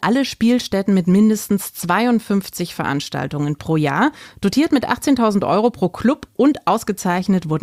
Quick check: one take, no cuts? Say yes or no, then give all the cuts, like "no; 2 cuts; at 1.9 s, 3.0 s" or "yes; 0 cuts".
yes; 0 cuts